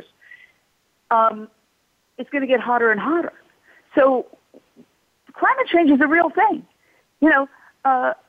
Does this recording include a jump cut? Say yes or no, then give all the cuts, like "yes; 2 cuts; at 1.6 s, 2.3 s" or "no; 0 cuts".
no; 0 cuts